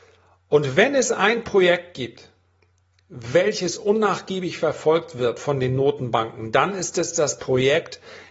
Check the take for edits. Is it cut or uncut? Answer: uncut